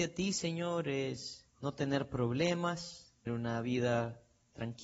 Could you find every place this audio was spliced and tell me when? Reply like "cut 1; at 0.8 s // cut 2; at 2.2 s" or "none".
cut 1; at 1.5 s // cut 2; at 3.3 s